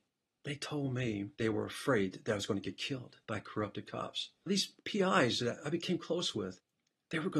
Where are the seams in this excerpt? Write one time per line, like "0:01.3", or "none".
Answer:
0:01.3
0:03.2
0:04.8